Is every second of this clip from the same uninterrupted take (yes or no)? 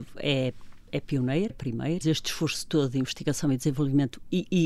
no